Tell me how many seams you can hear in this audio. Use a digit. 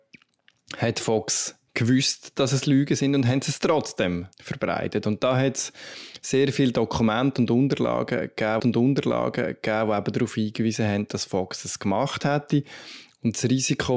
2